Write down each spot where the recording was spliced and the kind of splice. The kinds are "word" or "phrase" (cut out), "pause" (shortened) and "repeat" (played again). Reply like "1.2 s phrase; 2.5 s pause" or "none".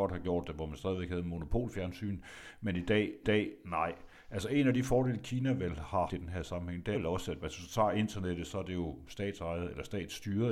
3.2 s repeat; 6.1 s word; 6.9 s word; 7.4 s word